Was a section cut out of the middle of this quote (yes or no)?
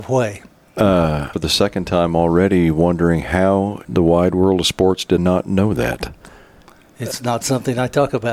yes